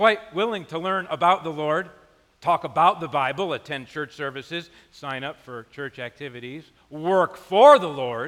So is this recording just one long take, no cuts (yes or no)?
yes